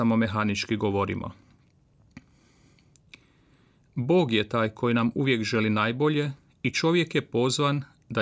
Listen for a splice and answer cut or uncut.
uncut